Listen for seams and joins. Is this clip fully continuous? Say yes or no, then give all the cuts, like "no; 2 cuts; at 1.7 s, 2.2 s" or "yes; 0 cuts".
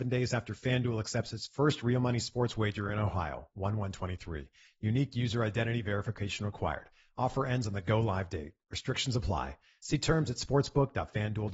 yes; 0 cuts